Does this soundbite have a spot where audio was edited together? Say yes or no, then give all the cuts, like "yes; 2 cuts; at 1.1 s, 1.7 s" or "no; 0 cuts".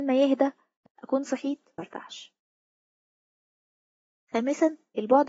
yes; 1 cut; at 1.8 s